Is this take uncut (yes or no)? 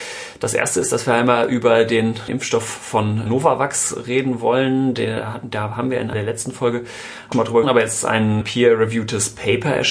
no